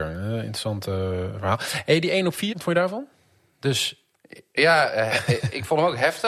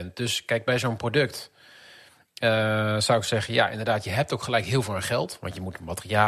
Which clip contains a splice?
first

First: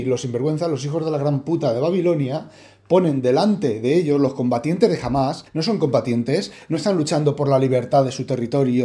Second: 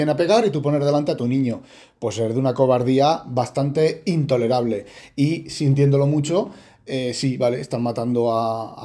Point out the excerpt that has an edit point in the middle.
first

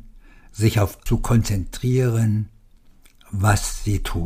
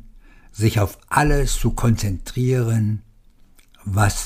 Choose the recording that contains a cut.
first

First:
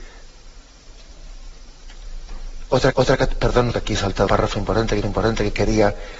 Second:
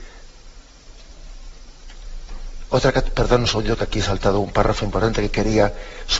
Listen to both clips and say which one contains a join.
first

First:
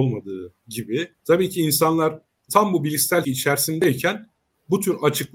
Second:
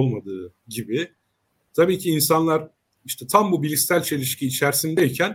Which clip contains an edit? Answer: first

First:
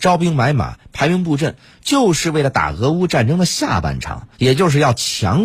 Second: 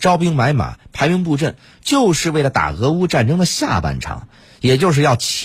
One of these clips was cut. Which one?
first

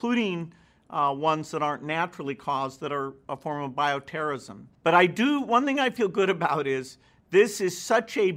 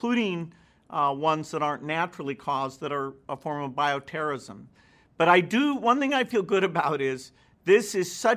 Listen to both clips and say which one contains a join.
first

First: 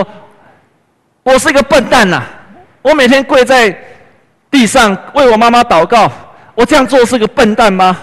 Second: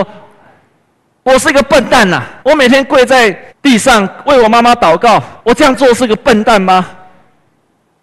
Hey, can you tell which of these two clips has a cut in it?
second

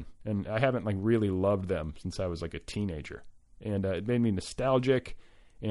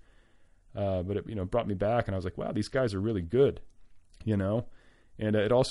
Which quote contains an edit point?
second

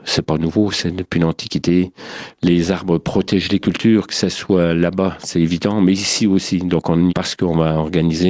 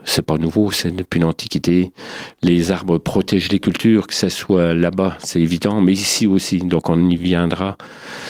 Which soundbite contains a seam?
first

